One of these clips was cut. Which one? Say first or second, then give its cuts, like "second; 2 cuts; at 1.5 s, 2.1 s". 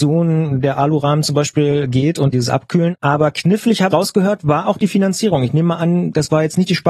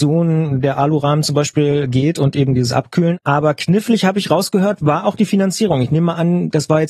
first; 2 cuts; at 2.3 s, 3.9 s